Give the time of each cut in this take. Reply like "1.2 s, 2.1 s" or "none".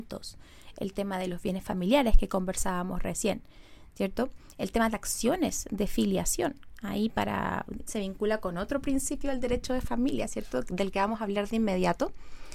4.9 s, 7.9 s